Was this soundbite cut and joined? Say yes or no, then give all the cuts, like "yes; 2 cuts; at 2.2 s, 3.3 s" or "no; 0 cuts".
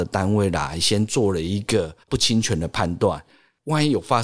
yes; 1 cut; at 2.0 s